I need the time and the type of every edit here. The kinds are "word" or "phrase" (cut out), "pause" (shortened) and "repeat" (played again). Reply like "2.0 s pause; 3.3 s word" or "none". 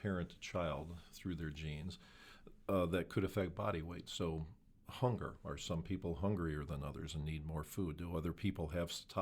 none